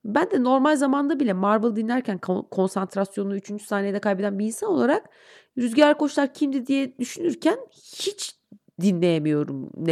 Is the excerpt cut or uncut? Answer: uncut